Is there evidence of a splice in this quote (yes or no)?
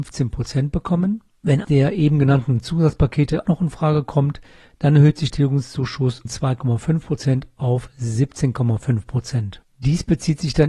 yes